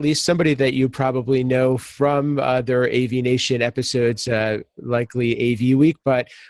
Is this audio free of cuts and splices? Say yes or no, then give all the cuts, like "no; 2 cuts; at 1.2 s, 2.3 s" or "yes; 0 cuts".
yes; 0 cuts